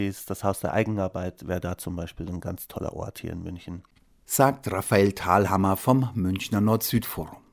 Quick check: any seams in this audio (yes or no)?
no